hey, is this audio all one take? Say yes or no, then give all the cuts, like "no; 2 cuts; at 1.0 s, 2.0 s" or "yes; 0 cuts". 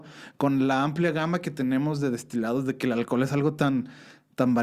yes; 0 cuts